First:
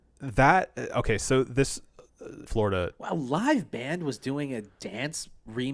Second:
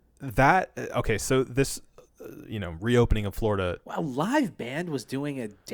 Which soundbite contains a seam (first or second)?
first